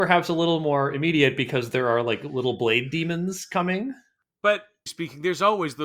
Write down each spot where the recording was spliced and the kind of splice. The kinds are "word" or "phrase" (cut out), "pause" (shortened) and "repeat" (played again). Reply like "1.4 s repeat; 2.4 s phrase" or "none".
4.9 s word